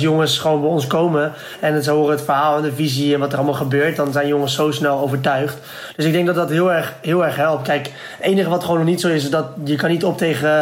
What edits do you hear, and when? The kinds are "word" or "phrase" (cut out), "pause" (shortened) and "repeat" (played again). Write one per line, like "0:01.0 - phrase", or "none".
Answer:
none